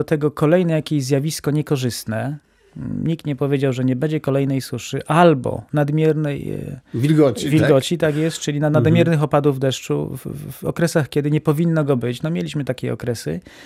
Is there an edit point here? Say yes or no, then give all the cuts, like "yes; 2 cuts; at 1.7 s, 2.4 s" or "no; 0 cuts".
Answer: no; 0 cuts